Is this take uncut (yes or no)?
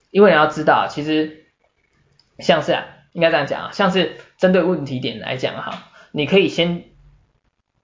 yes